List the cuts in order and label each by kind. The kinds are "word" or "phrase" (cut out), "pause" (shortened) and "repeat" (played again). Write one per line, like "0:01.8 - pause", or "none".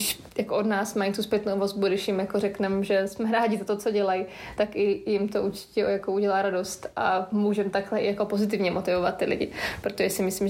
none